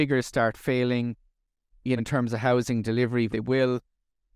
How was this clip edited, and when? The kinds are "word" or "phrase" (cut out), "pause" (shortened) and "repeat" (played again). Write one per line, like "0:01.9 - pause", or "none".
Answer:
0:02.0 - word
0:03.3 - word